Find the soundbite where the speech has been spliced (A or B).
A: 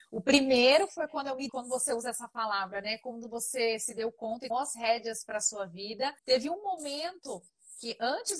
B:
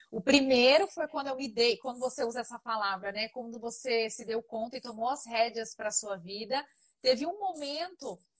A